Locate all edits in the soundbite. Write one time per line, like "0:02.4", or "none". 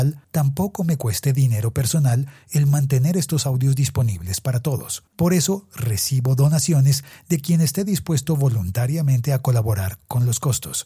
0:05.1

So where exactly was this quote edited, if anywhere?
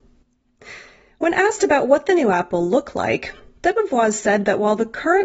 none

